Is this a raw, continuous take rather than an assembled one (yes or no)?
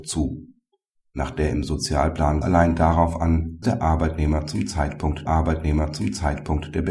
no